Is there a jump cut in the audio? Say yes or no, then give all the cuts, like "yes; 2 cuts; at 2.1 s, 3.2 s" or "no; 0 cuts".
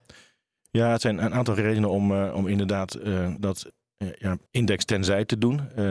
yes; 2 cuts; at 3.4 s, 4.5 s